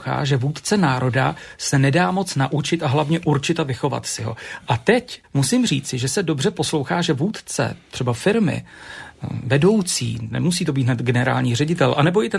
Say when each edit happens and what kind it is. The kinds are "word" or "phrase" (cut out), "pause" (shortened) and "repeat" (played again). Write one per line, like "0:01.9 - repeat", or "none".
0:05.2 - pause